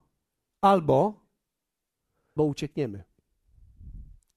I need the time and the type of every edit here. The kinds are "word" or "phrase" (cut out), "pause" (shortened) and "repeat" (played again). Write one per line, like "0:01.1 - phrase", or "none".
0:02.4 - word